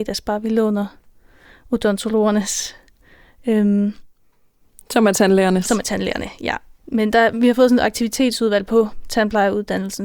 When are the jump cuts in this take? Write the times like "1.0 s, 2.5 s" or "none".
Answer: none